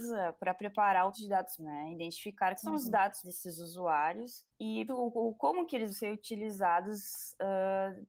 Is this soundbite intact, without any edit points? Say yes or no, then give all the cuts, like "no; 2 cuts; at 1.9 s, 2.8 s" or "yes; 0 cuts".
no; 6 cuts; at 1.1 s, 1.6 s, 2.6 s, 3.2 s, 4.9 s, 5.9 s